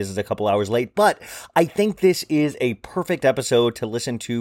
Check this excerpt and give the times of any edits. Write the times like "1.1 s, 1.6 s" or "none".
none